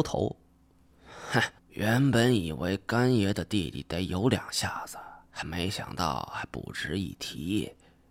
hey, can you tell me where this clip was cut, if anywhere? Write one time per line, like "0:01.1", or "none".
0:01.6